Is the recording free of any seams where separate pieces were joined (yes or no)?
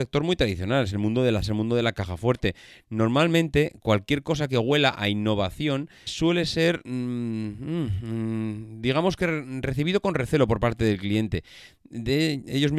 no